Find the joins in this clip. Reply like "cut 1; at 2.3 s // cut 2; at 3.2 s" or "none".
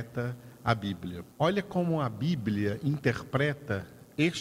cut 1; at 1.3 s

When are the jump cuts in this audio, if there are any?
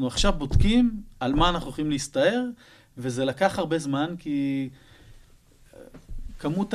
none

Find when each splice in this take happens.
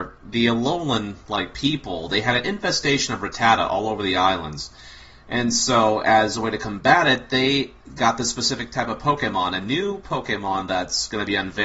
none

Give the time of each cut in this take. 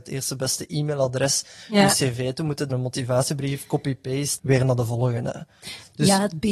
cut 1; at 2.7 s // cut 2; at 4.4 s

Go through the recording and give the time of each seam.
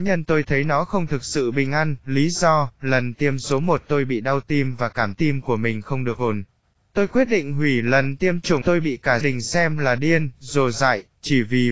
cut 1; at 5.1 s // cut 2; at 8.6 s // cut 3; at 9.2 s

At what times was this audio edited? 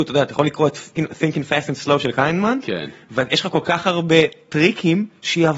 cut 1; at 1.0 s

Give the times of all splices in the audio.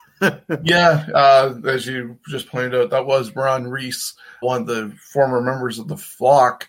cut 1; at 4.4 s

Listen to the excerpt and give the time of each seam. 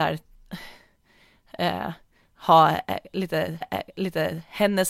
cut 1; at 3.6 s

